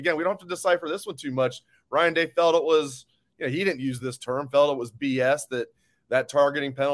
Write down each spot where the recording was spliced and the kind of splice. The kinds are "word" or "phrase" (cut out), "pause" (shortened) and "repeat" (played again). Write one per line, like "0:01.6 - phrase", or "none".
none